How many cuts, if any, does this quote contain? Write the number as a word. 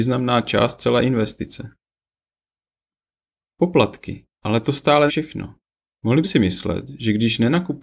three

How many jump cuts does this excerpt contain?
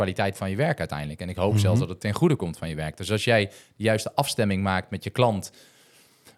zero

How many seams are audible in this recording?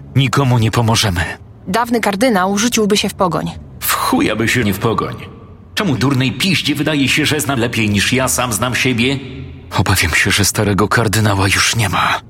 three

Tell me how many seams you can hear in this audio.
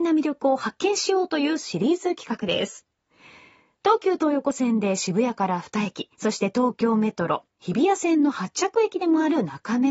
one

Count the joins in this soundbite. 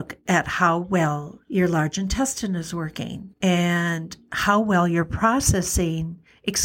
two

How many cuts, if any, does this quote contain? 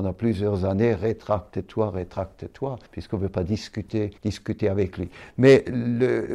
two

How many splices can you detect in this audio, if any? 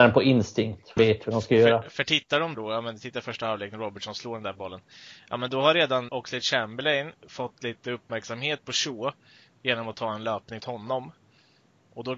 four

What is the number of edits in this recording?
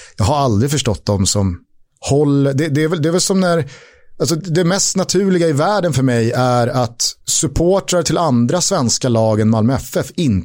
one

